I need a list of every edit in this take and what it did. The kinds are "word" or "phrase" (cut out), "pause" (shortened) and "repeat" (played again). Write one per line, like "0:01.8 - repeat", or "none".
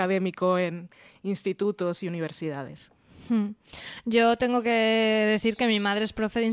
none

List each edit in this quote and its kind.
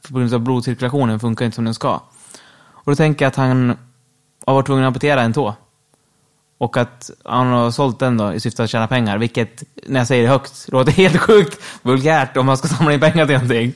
none

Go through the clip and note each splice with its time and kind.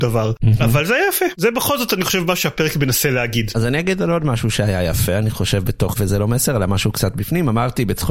0:05.9 - word

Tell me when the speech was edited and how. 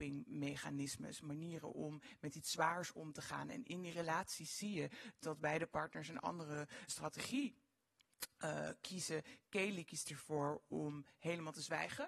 0:06.9 - word

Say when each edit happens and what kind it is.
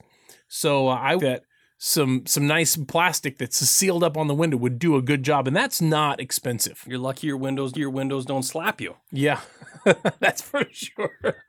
0:01.2 - phrase
0:07.7 - repeat

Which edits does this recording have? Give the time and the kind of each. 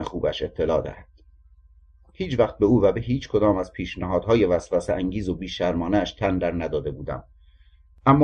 none

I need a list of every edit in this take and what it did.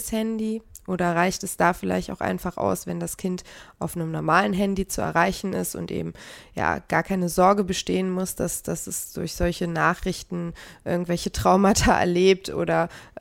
none

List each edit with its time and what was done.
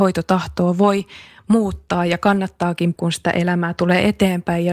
0:03.0 - word

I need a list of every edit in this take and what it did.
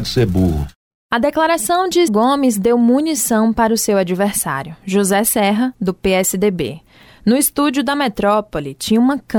0:02.1 - word

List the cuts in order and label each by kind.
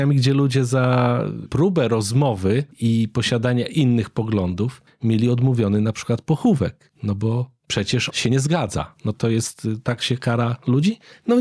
0:01.5 - phrase
0:02.7 - pause
0:08.1 - word
0:09.1 - word

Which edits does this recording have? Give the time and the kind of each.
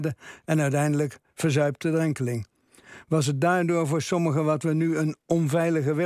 none

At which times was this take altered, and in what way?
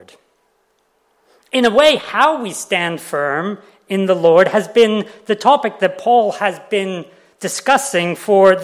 none

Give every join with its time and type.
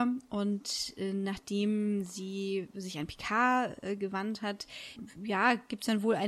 none

